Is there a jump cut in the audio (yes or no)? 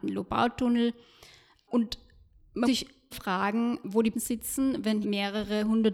yes